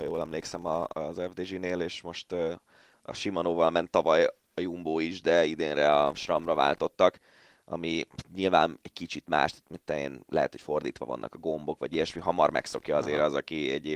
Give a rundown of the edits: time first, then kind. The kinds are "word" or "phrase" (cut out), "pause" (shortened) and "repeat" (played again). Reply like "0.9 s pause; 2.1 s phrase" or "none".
none